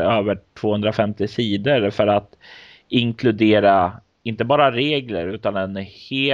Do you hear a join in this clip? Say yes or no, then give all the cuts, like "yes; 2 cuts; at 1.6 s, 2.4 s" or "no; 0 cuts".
no; 0 cuts